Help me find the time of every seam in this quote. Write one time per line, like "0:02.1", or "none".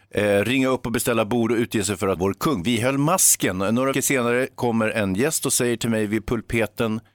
0:02.2
0:03.9